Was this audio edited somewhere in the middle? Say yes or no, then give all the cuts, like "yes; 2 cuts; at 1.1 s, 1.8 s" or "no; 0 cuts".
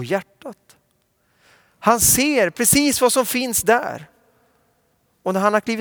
no; 0 cuts